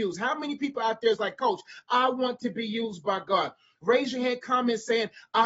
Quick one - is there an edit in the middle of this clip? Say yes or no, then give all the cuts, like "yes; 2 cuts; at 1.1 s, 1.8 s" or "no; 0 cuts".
no; 0 cuts